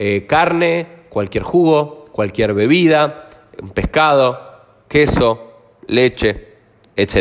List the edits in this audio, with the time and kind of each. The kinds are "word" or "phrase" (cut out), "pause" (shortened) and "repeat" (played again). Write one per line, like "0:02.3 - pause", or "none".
none